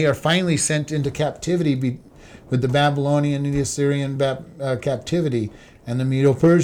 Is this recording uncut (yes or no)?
yes